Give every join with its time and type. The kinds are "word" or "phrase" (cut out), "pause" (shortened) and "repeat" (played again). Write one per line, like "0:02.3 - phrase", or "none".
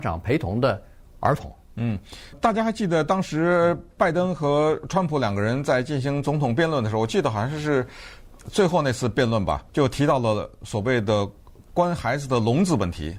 0:02.3 - word
0:09.7 - pause